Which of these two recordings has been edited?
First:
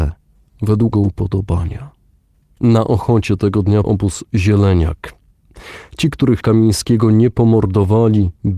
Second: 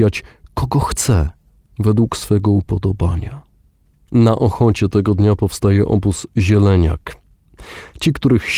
first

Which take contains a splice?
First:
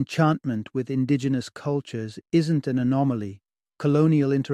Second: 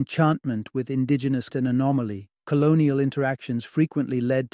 second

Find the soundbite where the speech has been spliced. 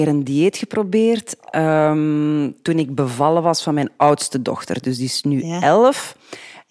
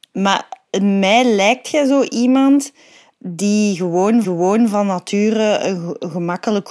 second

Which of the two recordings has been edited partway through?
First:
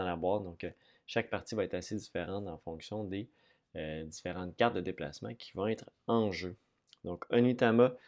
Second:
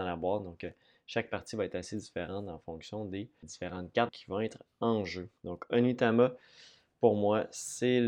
second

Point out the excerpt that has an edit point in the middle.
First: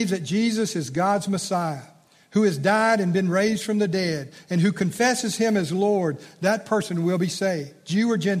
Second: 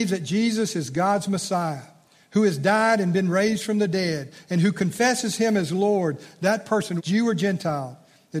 second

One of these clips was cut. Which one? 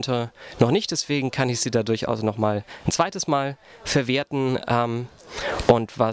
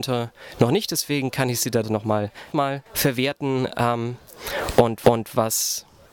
second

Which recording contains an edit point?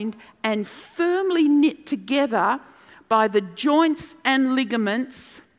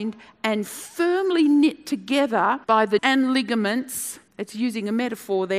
second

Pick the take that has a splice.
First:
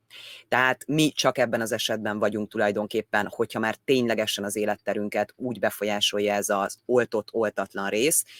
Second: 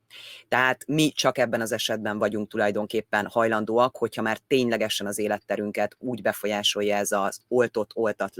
first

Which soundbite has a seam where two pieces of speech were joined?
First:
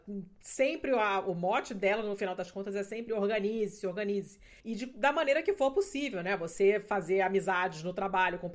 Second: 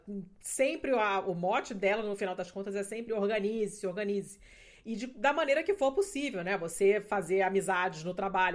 first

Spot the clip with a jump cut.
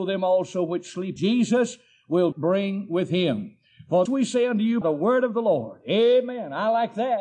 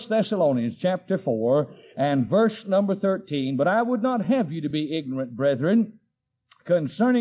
first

